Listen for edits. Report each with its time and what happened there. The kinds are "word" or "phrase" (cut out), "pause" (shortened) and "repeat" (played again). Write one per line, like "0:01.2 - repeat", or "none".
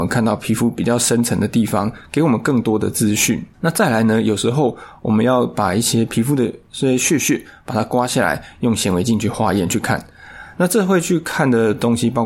0:03.5 - pause